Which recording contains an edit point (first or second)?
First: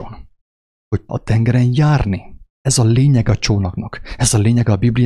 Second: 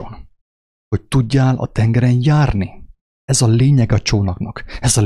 first